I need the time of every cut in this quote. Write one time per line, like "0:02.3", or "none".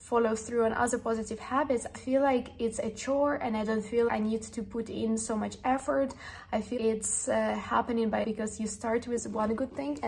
0:01.9
0:04.1
0:06.8
0:08.2